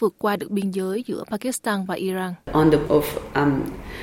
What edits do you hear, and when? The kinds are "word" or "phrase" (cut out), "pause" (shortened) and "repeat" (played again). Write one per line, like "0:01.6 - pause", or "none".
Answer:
0:02.4 - pause
0:02.8 - word

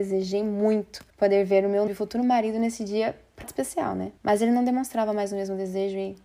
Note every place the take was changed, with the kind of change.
0:01.1 - pause
0:01.9 - word
0:03.4 - word
0:04.2 - pause

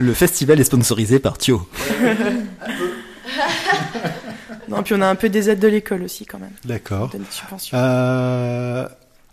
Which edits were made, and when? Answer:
0:06.6 - pause

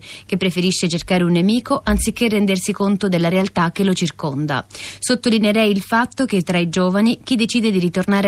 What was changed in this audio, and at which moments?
none

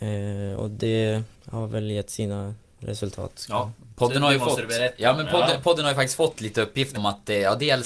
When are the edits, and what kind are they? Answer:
0:01.3 - pause
0:07.0 - word

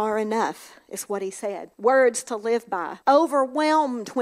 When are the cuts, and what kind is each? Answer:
0:01.7 - pause
0:03.0 - pause

